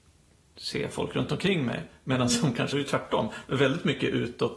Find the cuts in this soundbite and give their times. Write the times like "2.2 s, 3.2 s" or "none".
2.7 s